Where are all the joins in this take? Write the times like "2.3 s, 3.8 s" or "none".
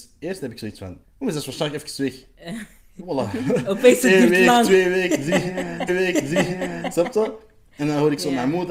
1.0 s, 5.9 s